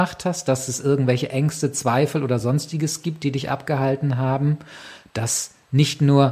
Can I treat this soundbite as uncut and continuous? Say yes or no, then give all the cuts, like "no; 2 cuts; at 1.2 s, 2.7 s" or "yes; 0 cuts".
yes; 0 cuts